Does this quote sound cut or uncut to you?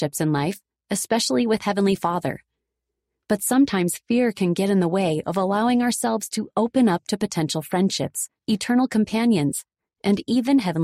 cut